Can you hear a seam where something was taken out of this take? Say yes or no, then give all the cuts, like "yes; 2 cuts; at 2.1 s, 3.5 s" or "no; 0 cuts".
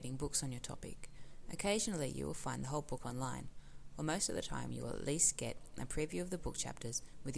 no; 0 cuts